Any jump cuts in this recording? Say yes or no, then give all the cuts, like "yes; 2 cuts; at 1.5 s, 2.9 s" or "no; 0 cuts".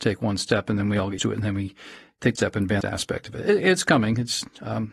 yes; 3 cuts; at 1.2 s, 2.4 s, 2.8 s